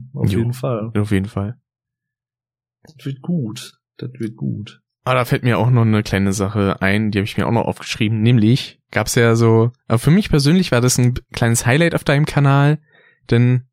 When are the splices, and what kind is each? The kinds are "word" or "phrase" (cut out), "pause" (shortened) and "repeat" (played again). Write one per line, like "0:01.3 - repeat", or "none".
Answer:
0:03.9 - pause